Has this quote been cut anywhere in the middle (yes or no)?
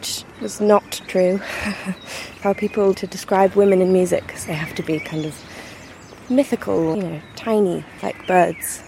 yes